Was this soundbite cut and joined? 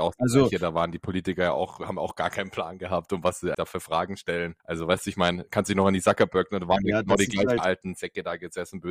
yes; 2 cuts; at 3.5 s, 4.6 s

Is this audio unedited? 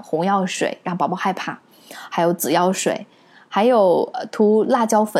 yes; 0 cuts

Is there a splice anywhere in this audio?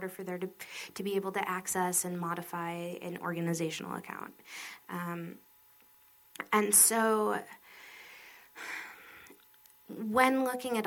no; 0 cuts

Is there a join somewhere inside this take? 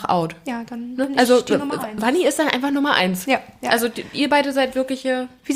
no; 0 cuts

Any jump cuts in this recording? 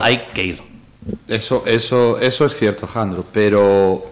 no; 0 cuts

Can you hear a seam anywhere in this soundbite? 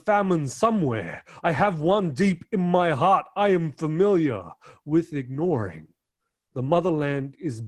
no; 0 cuts

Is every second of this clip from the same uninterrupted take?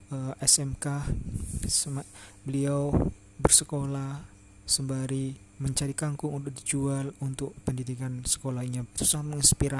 no; 2 cuts; at 7.6 s, 8.9 s

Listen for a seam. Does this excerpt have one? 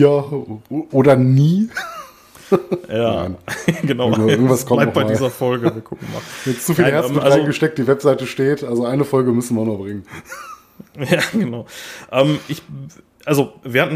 no; 0 cuts

